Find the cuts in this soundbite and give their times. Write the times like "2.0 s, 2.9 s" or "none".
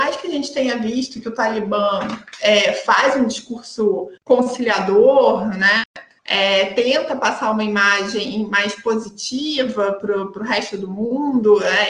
4.2 s, 6.2 s